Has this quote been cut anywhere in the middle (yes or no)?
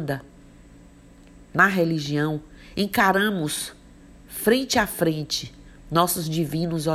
no